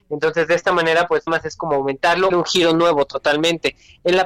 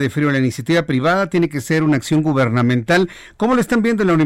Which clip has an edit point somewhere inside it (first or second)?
first